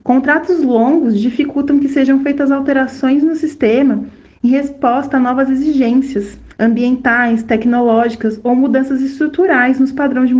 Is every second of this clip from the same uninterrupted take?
yes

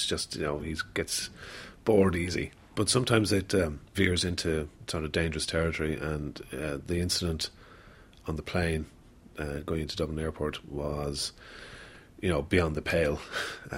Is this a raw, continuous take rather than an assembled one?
yes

